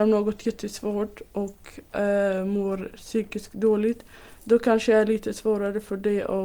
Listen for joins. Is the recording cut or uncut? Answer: uncut